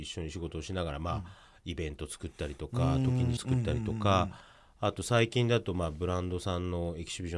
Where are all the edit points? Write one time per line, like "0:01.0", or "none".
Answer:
0:03.4